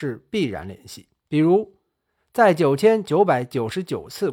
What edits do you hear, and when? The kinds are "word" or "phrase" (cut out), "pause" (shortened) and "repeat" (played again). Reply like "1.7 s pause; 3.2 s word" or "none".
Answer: 1.2 s pause